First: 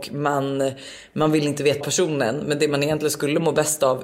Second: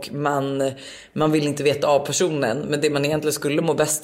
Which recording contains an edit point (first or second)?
first